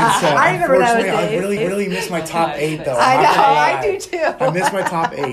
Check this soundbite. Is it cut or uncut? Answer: cut